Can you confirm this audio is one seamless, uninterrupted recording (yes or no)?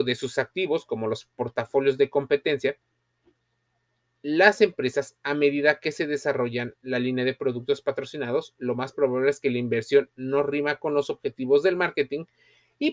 yes